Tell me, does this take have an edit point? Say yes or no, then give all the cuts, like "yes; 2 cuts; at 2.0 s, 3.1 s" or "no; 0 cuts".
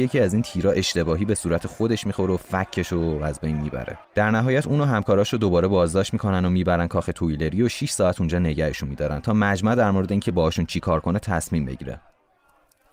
yes; 1 cut; at 4.0 s